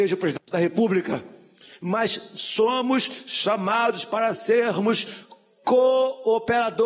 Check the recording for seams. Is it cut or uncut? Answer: uncut